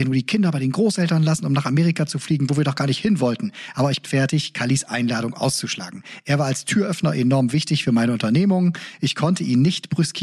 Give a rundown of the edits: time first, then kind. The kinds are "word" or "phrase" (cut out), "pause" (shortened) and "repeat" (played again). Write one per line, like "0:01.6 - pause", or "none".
0:04.0 - phrase